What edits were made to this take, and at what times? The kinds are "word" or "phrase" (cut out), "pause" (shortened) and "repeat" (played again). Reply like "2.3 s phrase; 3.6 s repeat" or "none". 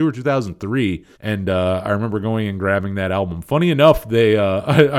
1.1 s pause